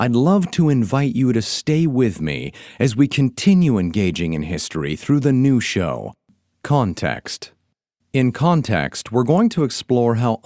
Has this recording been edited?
no; 0 cuts

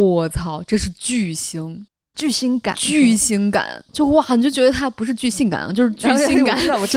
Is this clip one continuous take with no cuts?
yes; 0 cuts

